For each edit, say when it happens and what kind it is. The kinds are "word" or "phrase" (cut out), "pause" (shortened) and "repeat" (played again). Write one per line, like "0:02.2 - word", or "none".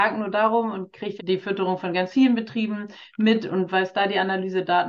0:01.2 - word